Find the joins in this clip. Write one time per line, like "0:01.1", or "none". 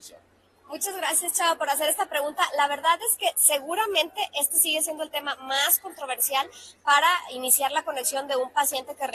none